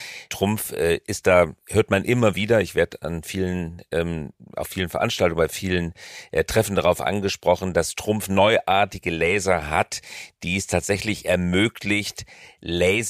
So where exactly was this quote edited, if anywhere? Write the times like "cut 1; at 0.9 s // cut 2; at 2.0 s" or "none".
none

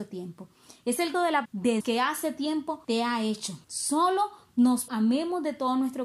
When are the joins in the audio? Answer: cut 1; at 1.1 s // cut 2; at 1.4 s // cut 3; at 1.8 s // cut 4; at 2.8 s // cut 5; at 3.6 s // cut 6; at 4.9 s

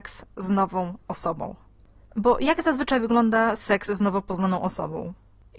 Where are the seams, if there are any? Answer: none

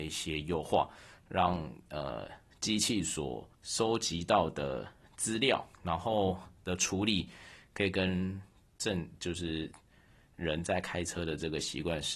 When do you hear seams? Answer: cut 1; at 3.5 s // cut 2; at 5.7 s

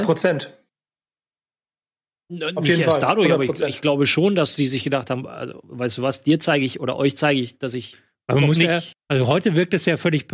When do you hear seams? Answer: cut 1; at 8.9 s

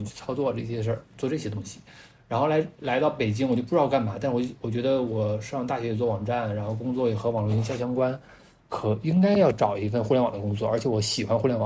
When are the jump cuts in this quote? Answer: none

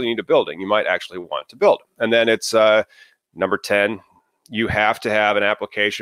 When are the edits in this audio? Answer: none

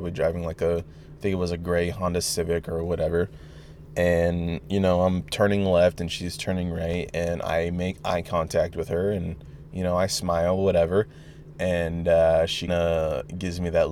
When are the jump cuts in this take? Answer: cut 1; at 12.7 s

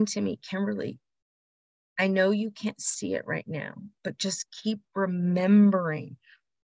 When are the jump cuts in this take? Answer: none

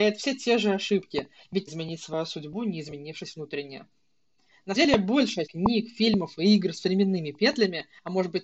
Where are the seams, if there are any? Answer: cut 1; at 1.7 s // cut 2; at 4.8 s // cut 3; at 5.5 s

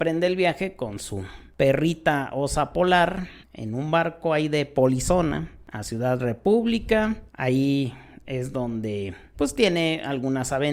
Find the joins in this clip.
cut 1; at 3.4 s // cut 2; at 7.3 s // cut 3; at 9.3 s

